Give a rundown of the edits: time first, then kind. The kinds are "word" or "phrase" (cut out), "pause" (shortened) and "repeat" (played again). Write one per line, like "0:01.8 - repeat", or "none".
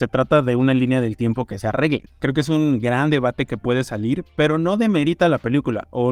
none